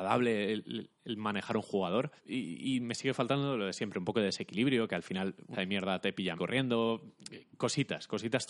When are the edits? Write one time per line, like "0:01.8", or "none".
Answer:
0:02.2
0:05.5
0:06.4